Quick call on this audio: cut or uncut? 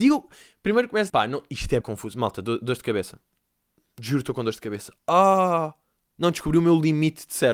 cut